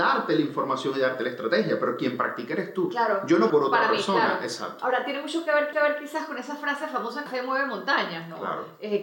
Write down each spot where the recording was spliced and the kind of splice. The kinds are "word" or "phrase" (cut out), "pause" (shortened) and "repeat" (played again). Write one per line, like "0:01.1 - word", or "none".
0:03.5 - phrase
0:05.7 - repeat
0:07.3 - phrase